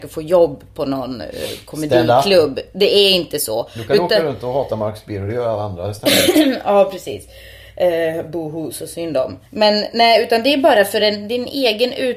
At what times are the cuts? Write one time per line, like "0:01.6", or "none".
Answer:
0:09.5

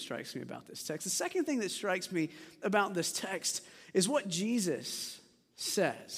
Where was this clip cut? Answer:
none

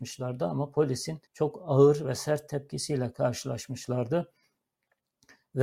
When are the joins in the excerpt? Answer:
0:01.3

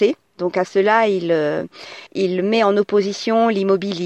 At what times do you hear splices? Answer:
0:02.1

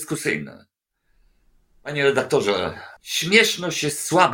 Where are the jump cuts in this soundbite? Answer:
0:03.0

